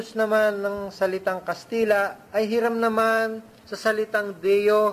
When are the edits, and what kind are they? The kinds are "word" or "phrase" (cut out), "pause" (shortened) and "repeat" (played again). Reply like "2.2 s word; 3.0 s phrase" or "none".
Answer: 2.3 s pause